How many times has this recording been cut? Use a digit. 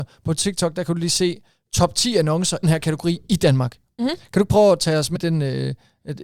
2